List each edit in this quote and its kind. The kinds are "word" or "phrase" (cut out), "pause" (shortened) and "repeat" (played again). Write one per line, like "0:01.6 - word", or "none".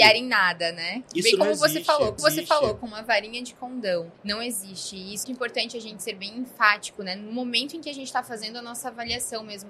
0:02.2 - repeat
0:04.1 - pause
0:05.2 - word